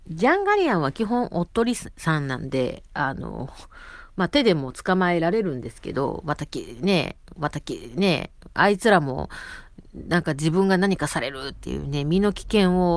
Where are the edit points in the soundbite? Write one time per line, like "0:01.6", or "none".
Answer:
0:07.4